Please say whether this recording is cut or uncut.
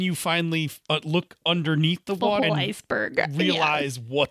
cut